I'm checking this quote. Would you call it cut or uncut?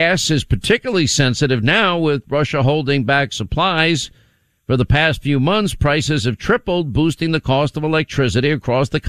uncut